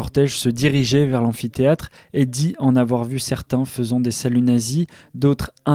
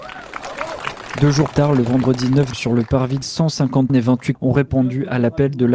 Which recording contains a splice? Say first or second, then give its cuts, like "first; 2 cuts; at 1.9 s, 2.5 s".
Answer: second; 5 cuts; at 1.5 s, 2.5 s, 3.2 s, 3.9 s, 4.3 s